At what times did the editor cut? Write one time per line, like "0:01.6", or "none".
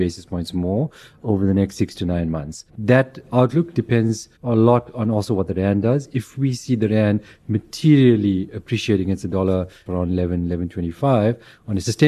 0:02.7
0:04.4
0:09.9

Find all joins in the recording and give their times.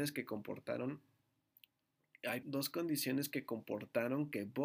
0:02.4

